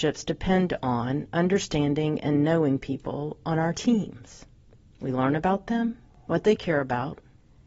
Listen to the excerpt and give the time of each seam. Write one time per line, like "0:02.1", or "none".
none